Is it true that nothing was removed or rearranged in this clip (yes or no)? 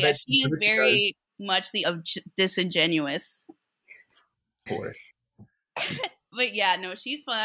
no